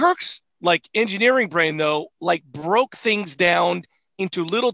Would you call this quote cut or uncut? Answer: uncut